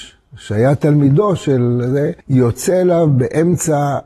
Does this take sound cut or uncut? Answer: cut